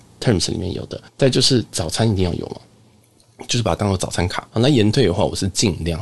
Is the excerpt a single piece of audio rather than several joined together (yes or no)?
no